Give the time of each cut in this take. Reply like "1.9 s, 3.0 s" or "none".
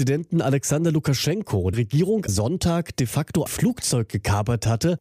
1.7 s, 2.3 s, 3.5 s